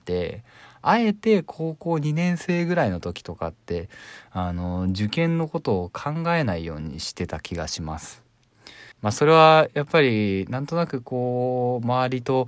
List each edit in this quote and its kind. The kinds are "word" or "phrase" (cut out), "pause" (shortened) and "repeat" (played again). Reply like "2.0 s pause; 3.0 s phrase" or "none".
8.9 s pause